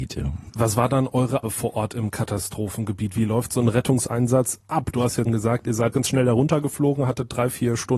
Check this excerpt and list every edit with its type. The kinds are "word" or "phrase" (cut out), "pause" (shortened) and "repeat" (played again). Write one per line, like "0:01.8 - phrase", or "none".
0:01.4 - word
0:05.3 - word
0:05.9 - word